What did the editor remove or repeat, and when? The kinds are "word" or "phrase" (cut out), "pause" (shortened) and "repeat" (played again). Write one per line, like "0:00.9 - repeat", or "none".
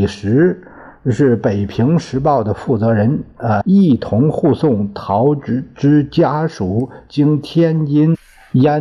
0:03.6 - word

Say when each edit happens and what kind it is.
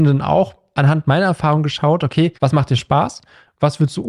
0:02.4 - pause

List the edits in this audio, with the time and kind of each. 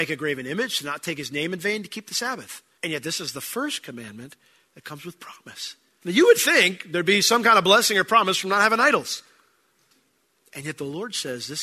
none

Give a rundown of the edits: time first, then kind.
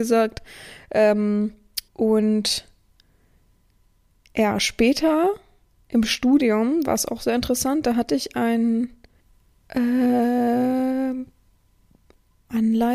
0:01.9 - pause
0:09.2 - pause

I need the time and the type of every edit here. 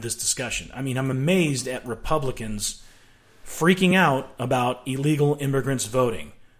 none

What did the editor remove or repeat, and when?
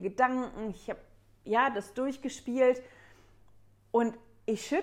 none

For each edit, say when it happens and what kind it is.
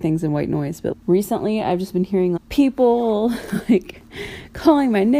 0:00.9 - word
0:02.4 - word

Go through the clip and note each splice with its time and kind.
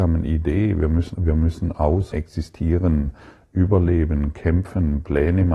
0:01.1 - word
0:02.1 - phrase

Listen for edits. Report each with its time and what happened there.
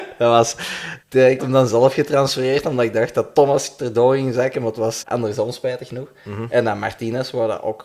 0:01.0 - pause
0:01.4 - word
0:05.0 - word

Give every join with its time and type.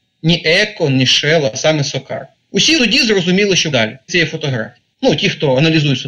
0:02.8 - word
0:03.7 - word
0:04.1 - word
0:04.9 - pause

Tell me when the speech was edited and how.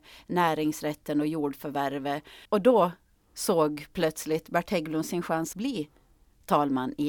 0:02.4 - pause
0:05.5 - word

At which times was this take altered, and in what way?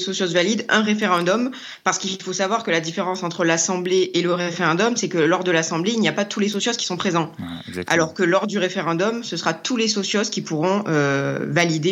none

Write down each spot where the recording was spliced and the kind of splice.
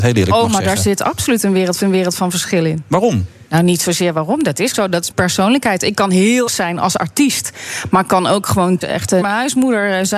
0:01.8 - repeat
0:03.5 - pause
0:04.7 - word
0:05.1 - word
0:06.5 - word
0:08.8 - word
0:09.2 - word

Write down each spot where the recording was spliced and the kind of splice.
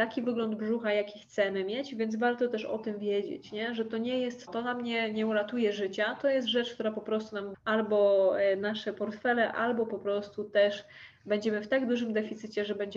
0:04.5 - word
0:07.5 - word

